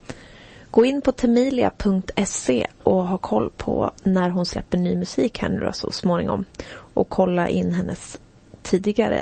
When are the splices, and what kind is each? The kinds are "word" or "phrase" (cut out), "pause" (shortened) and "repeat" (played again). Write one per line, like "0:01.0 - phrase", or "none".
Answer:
0:04.0 - pause

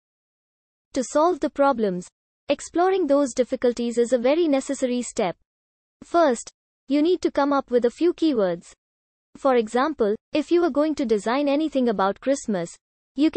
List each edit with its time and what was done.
0:10.2 - pause

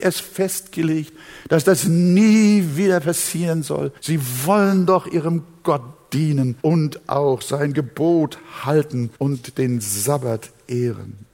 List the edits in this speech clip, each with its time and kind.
0:04.0 - pause
0:06.6 - pause
0:09.1 - pause

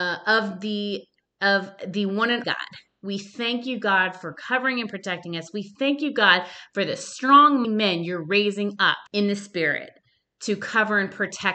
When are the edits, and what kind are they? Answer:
0:02.4 - phrase
0:07.6 - word
0:09.1 - pause

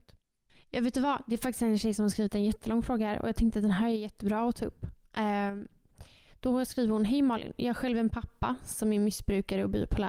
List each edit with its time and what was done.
none

